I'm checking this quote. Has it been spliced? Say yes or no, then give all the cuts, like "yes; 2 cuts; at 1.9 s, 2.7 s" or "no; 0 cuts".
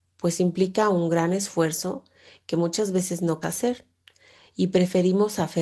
yes; 1 cut; at 3.4 s